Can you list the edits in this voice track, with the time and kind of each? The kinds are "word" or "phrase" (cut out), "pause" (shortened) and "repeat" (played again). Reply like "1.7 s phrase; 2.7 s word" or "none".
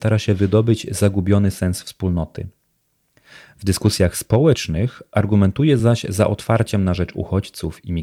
none